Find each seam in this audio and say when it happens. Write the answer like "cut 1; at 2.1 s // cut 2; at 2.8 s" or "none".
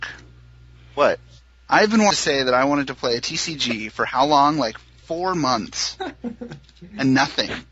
none